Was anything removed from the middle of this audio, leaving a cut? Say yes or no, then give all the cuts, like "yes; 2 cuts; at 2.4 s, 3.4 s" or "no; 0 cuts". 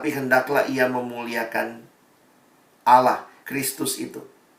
yes; 1 cut; at 3.4 s